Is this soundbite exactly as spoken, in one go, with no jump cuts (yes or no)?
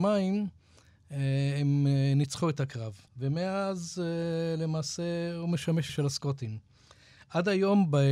no